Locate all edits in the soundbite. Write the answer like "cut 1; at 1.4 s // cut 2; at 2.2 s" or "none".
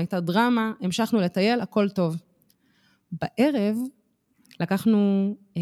none